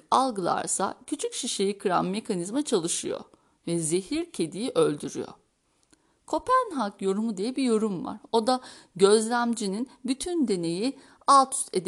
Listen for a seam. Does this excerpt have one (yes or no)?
no